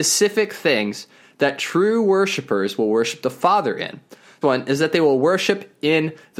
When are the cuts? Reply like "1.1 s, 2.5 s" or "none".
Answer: 4.4 s